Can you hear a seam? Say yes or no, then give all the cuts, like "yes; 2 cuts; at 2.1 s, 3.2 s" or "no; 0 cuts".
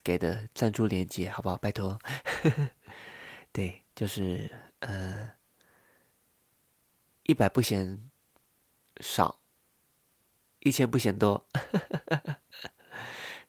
no; 0 cuts